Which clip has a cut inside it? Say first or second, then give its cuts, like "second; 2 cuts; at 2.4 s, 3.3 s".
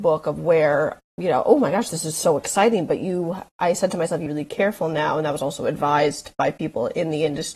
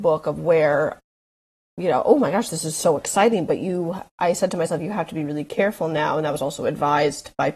first; 2 cuts; at 1.1 s, 4.3 s